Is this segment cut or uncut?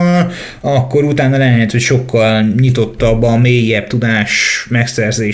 uncut